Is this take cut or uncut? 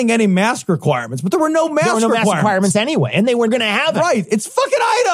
cut